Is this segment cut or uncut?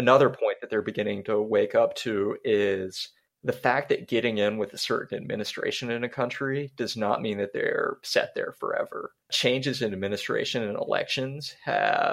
cut